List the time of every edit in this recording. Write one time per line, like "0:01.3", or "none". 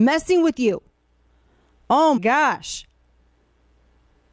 0:02.2